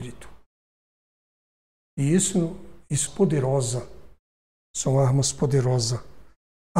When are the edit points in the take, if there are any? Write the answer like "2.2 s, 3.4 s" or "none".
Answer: 3.1 s